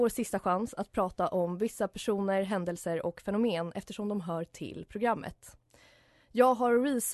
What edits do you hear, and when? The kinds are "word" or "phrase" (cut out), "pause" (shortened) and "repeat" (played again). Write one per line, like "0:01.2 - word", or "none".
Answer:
none